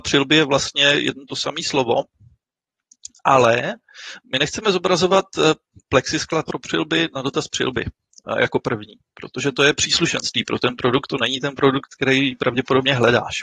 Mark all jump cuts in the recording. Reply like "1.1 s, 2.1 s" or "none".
none

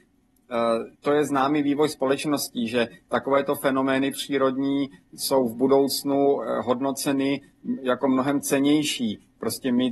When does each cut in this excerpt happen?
0.9 s

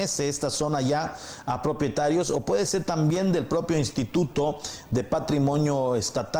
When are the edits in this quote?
none

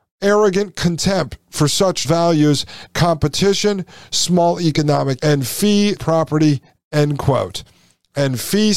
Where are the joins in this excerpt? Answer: 2.0 s, 2.9 s, 5.2 s, 6.0 s

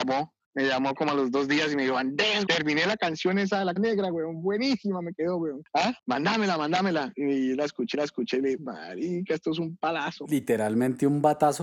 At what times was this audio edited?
2.5 s, 3.8 s, 7.9 s, 8.6 s

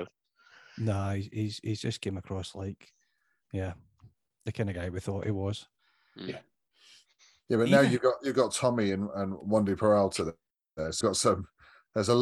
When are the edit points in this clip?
11.0 s

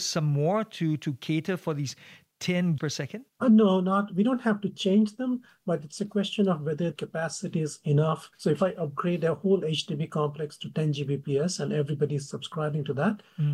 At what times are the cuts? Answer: 2.8 s, 3.3 s, 6.9 s, 8.3 s

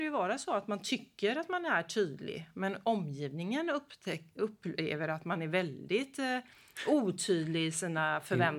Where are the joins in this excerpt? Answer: none

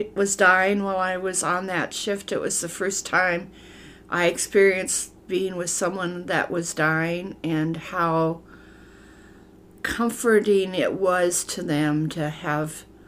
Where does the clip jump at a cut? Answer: none

